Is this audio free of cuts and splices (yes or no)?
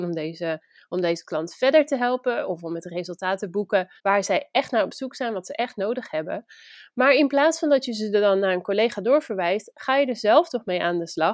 no